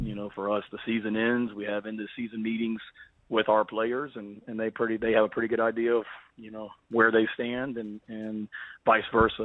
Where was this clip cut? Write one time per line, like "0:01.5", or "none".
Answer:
none